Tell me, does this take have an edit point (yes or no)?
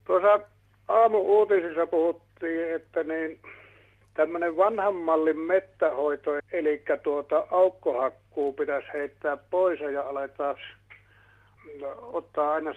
yes